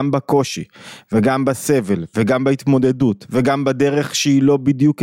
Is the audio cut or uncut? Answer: uncut